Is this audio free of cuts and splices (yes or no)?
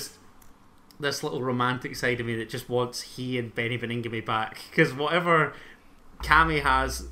yes